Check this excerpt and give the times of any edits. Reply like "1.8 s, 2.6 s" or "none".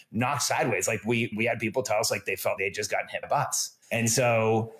1.3 s, 2.6 s, 3.2 s, 3.8 s

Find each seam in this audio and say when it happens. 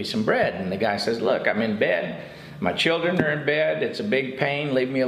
none

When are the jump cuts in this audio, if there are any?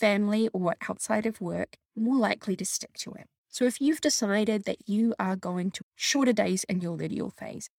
1.8 s, 3.4 s, 5.8 s

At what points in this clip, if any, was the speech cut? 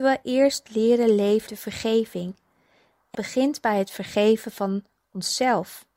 1.5 s, 3.1 s

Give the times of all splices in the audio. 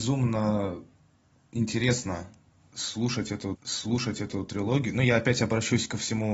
3.5 s

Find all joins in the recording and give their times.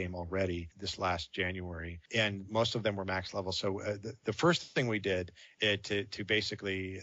none

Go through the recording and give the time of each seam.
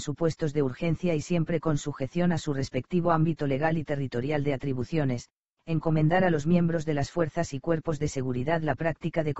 none

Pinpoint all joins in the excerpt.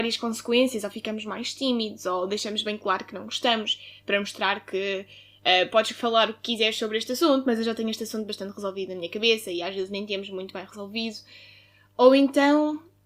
none

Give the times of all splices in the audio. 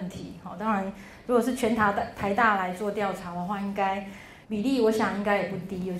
4.4 s

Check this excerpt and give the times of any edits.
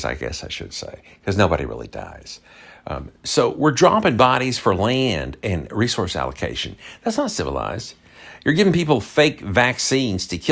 none

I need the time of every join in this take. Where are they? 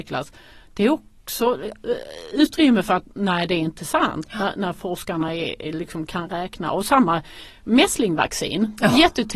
none

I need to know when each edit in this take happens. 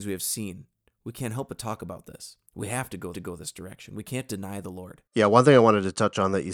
2.5 s, 3.1 s, 5.1 s

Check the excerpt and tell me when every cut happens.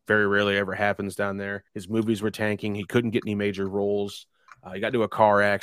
1.7 s

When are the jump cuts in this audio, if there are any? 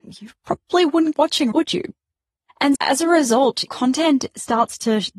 1.1 s, 1.5 s, 2.8 s, 3.7 s

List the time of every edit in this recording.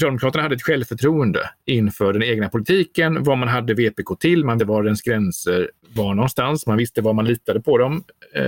1.6 s, 4.6 s, 5.8 s

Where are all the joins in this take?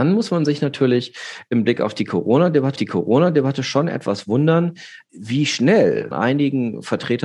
2.8 s, 5.1 s, 6.1 s

